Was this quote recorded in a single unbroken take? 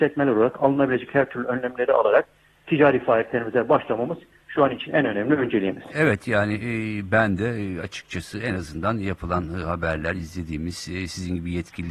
yes; 0 cuts

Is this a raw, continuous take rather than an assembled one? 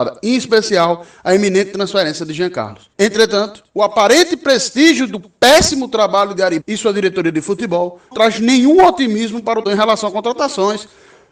no; 4 cuts; at 2.9 s, 6.6 s, 8.1 s, 9.7 s

